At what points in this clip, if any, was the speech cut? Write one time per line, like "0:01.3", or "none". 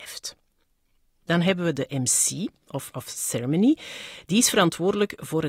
0:02.9